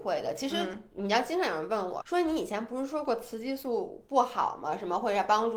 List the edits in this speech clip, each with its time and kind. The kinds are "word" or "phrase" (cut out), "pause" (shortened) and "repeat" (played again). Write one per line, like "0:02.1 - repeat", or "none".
0:02.0 - word

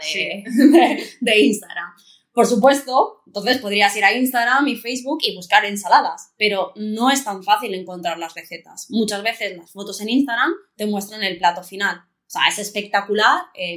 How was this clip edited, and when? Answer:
none

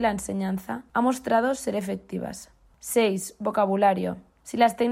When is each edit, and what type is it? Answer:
none

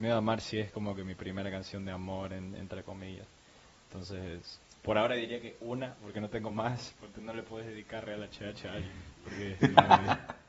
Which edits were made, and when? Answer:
none

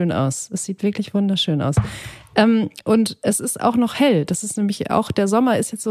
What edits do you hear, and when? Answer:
none

